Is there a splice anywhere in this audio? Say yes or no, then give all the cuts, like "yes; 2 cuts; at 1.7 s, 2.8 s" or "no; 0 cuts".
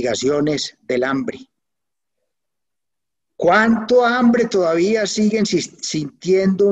no; 0 cuts